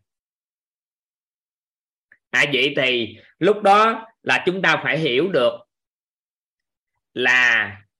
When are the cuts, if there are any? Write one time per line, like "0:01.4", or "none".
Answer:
none